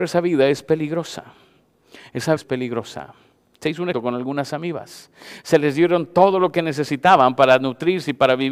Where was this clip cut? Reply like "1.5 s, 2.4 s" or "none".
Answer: 2.4 s, 3.9 s